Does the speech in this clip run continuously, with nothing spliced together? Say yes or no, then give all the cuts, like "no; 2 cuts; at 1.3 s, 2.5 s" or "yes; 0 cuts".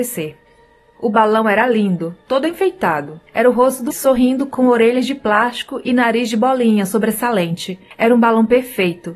no; 2 cuts; at 3.3 s, 3.9 s